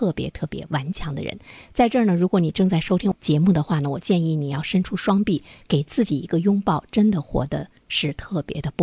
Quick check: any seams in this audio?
no; 0 cuts

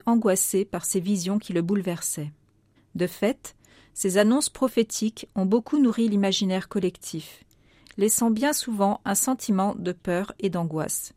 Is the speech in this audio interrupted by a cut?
no; 0 cuts

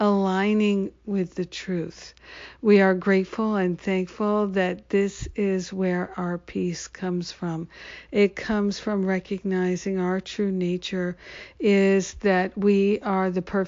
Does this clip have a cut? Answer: no; 0 cuts

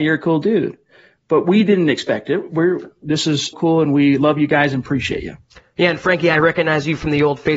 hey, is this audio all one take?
no; 1 cut; at 3.5 s

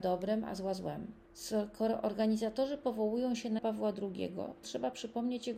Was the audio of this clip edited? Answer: yes; 3 cuts; at 1.2 s, 3.6 s, 4.6 s

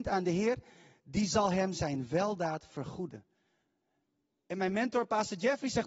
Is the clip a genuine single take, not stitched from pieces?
yes; 0 cuts

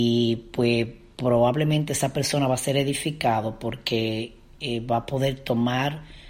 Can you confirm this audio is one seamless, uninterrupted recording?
yes; 0 cuts

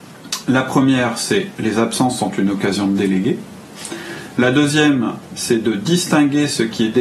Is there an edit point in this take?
no; 0 cuts

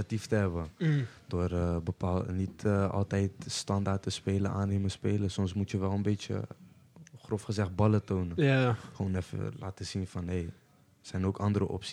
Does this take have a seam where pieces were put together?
no; 0 cuts

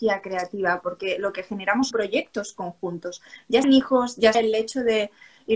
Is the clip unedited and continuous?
no; 3 cuts; at 1.9 s, 3.6 s, 4.3 s

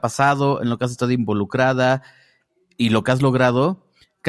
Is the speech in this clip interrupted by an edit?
no; 0 cuts

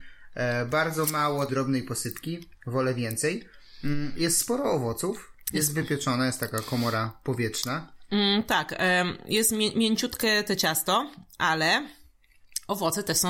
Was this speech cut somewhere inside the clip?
yes; 1 cut; at 1.5 s

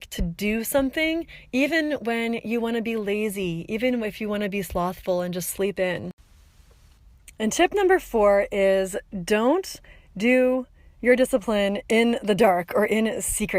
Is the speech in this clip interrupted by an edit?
no; 0 cuts

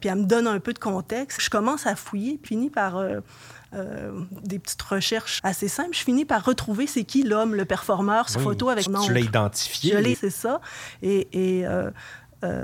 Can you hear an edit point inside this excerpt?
yes; 6 cuts; at 1.4 s, 2.5 s, 5.4 s, 8.3 s, 8.9 s, 10.1 s

